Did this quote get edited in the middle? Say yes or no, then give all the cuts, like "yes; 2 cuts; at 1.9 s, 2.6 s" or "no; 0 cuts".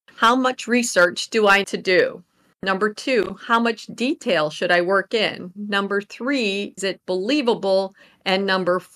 yes; 2 cuts; at 1.6 s, 6.8 s